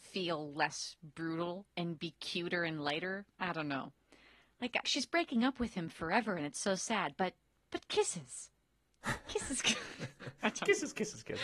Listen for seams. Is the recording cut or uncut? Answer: cut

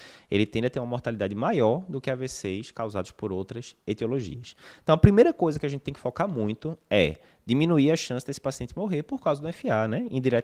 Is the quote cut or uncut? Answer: uncut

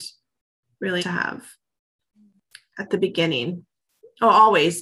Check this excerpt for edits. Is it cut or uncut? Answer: cut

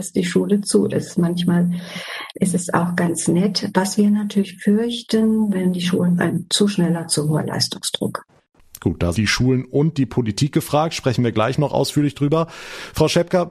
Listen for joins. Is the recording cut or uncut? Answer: cut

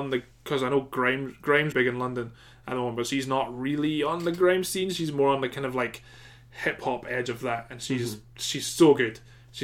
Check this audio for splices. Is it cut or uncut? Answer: cut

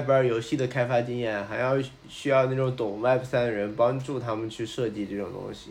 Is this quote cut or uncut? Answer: uncut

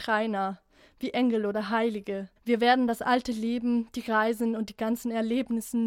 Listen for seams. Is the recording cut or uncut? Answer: cut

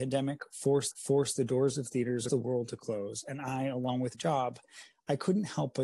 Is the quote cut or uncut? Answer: cut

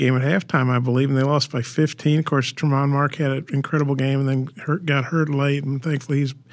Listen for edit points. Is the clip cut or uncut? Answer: uncut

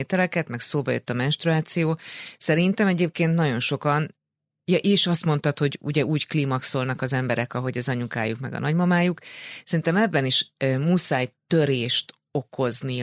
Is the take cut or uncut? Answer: uncut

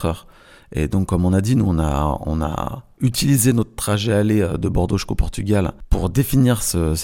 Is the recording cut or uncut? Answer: uncut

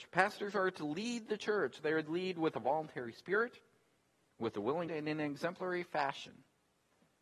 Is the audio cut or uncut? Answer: cut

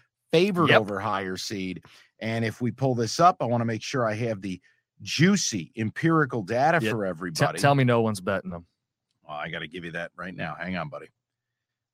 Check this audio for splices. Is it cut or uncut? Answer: uncut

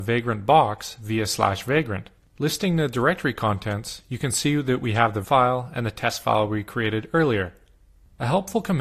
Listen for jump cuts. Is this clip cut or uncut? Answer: cut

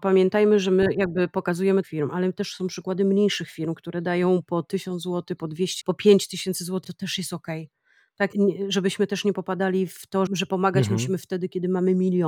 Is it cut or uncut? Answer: cut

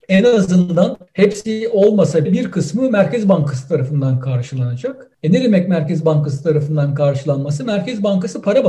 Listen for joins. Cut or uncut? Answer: cut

